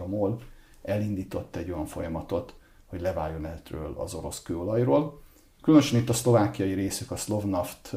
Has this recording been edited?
no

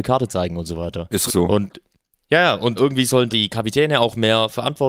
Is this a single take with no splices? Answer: no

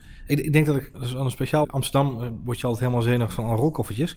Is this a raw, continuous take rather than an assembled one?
no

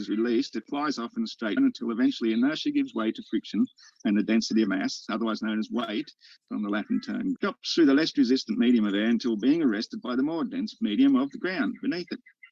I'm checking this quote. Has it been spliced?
yes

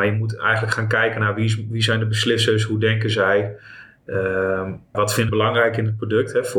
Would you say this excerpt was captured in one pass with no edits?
no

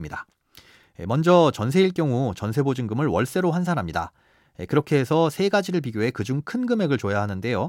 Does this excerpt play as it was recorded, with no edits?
yes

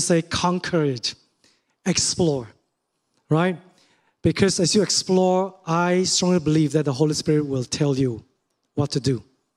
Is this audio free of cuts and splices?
yes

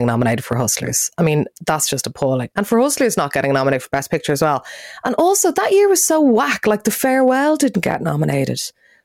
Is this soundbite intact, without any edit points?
yes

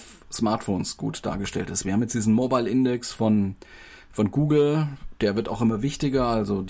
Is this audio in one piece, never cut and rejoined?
yes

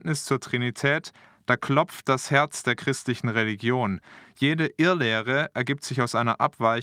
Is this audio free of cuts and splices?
yes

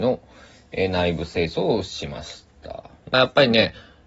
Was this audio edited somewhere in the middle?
yes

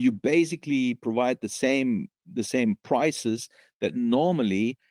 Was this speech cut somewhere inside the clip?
no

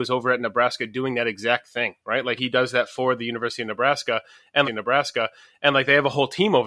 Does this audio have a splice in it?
yes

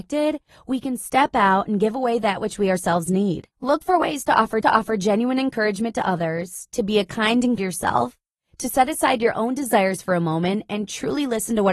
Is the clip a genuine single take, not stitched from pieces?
no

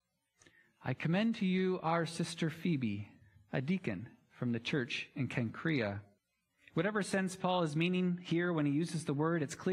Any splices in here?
yes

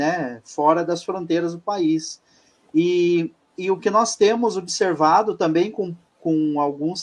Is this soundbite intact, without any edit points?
yes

